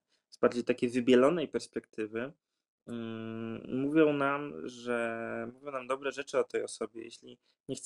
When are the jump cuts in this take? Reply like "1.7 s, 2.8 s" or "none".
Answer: none